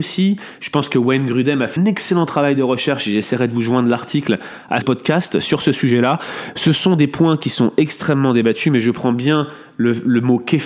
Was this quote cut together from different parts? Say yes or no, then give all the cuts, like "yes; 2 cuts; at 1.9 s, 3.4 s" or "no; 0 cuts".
yes; 2 cuts; at 1.8 s, 4.8 s